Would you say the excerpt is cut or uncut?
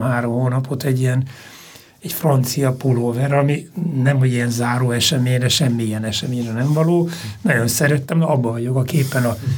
uncut